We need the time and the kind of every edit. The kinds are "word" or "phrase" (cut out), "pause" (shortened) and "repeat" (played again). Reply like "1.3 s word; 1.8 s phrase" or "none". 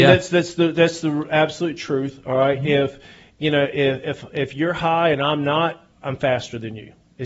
5.9 s pause